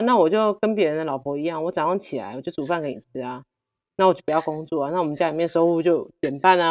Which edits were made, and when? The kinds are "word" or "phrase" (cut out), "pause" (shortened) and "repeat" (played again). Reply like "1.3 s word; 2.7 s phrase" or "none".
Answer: none

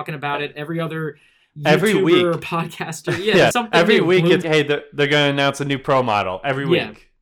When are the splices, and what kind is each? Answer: 3.5 s word; 4.4 s word

